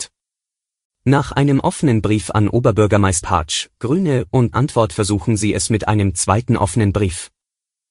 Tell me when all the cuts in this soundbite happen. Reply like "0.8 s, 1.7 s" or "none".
3.2 s, 4.5 s